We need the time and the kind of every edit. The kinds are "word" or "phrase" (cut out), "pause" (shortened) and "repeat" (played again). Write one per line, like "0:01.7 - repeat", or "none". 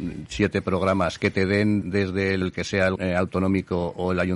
0:01.8 - word
0:02.4 - word
0:03.0 - word